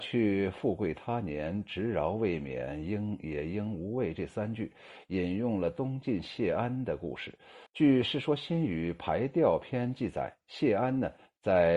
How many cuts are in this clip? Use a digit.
1